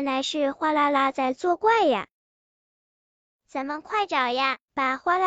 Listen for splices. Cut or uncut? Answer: uncut